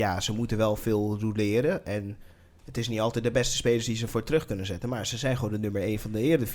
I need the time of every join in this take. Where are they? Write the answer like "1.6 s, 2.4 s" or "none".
none